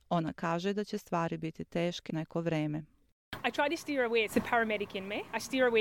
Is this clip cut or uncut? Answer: cut